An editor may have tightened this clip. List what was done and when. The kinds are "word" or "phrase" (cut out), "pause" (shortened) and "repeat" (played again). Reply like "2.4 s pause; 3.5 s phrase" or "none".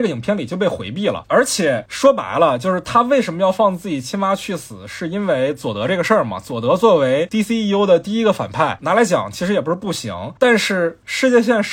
none